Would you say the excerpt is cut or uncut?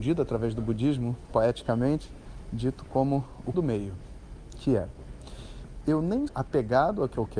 cut